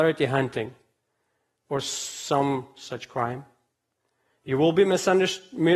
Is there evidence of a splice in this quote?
no; 0 cuts

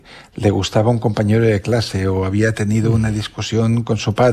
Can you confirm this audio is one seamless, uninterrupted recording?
yes; 0 cuts

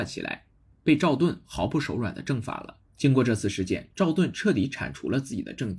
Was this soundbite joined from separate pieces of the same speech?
yes; 1 cut; at 2.9 s

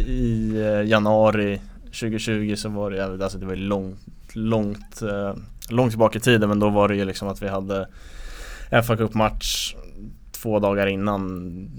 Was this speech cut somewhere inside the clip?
no; 0 cuts

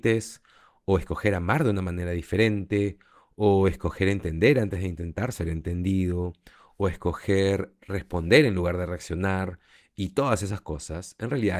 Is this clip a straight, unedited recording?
yes; 0 cuts

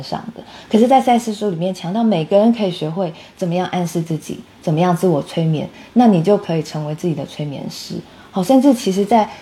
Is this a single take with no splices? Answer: yes; 0 cuts

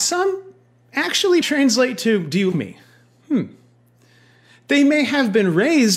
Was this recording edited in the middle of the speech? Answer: yes; 2 cuts; at 1.4 s, 2.5 s

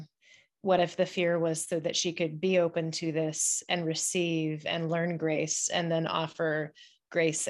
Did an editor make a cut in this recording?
no; 0 cuts

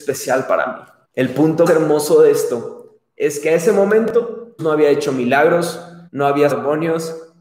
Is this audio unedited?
no; 5 cuts; at 1.0 s, 1.7 s, 4.6 s, 6.1 s, 6.5 s

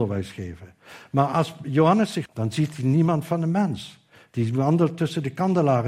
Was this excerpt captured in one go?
no; 1 cut; at 2.3 s

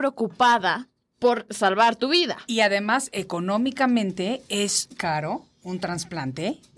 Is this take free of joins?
no; 1 cut; at 4.9 s

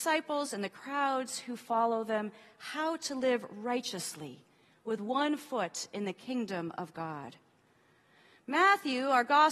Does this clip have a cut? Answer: no; 0 cuts

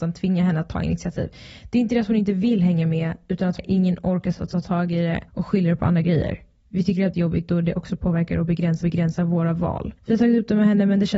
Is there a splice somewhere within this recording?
yes; 5 cuts; at 3.6 s, 5.3 s, 7.1 s, 8.8 s, 10.0 s

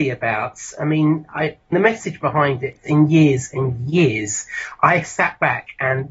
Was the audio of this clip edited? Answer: yes; 2 cuts; at 1.7 s, 2.9 s

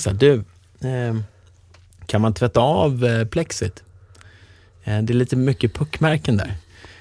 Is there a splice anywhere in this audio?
no; 0 cuts

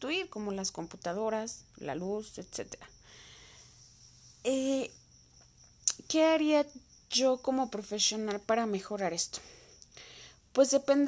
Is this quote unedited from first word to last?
yes; 0 cuts

